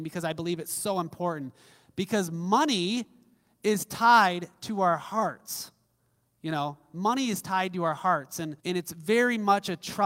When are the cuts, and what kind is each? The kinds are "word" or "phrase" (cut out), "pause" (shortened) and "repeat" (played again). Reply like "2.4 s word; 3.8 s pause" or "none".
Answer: 8.6 s pause

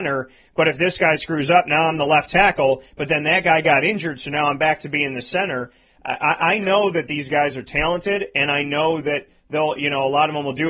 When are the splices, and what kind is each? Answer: none

